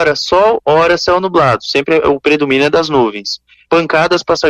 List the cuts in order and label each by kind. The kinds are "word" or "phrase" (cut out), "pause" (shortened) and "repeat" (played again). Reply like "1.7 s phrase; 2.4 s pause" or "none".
none

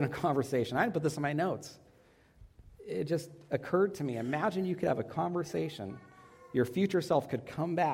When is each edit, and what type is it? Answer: none

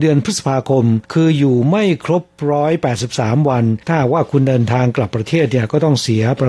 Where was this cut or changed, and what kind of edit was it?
1.0 s pause; 3.8 s pause

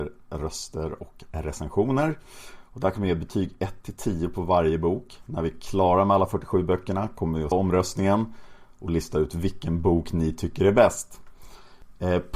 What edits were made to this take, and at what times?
7.5 s word

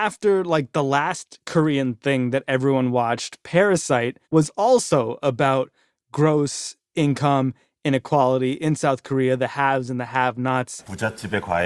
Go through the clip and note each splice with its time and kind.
4.2 s pause

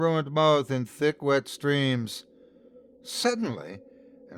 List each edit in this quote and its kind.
none

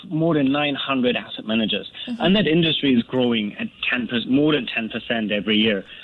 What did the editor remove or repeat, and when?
none

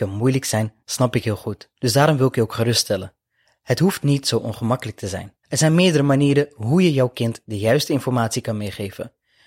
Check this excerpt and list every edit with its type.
1.8 s pause; 5.4 s pause

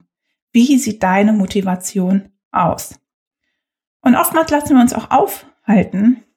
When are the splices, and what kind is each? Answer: none

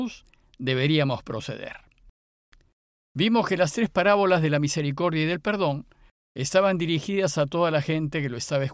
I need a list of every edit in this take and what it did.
none

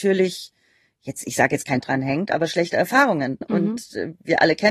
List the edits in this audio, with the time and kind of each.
1.8 s word; 3.4 s word

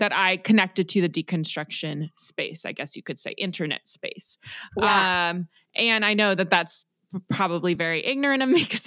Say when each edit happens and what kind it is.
none

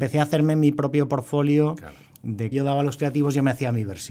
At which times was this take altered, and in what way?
2.5 s phrase

